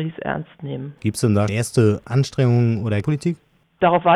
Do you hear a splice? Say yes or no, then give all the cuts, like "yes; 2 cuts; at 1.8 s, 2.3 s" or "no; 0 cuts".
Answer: yes; 3 cuts; at 1.0 s, 1.5 s, 3.0 s